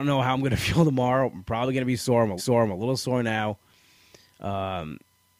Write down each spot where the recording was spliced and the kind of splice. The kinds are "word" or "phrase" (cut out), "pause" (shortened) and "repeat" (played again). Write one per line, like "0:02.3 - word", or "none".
0:02.4 - repeat